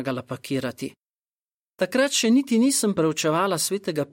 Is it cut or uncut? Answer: uncut